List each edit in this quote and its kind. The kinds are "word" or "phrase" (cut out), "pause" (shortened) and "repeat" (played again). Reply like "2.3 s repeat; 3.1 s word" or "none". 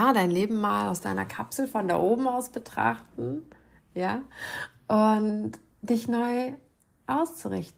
none